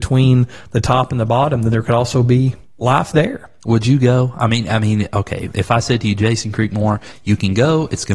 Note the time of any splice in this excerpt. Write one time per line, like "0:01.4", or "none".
none